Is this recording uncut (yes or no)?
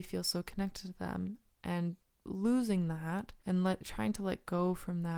yes